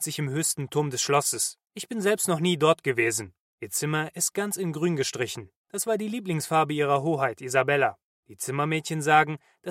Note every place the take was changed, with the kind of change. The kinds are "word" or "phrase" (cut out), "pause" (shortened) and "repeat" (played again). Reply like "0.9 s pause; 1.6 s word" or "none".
none